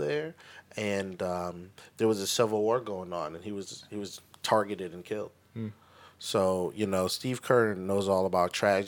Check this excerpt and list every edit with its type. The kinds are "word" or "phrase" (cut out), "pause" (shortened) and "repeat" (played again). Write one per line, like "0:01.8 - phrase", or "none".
none